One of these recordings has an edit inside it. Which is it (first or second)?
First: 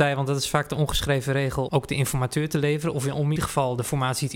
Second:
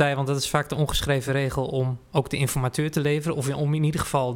first